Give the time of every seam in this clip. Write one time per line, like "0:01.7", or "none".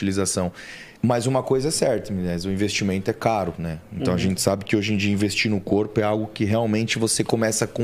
0:01.0